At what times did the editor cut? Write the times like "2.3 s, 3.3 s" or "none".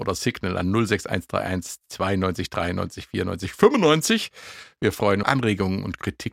5.2 s